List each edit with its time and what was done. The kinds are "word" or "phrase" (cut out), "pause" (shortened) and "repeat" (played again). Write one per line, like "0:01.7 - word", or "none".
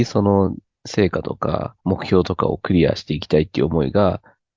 0:01.8 - pause